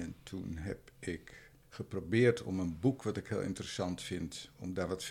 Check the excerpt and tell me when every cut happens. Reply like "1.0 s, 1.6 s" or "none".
1.6 s